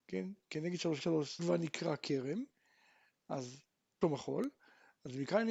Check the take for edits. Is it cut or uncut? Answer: cut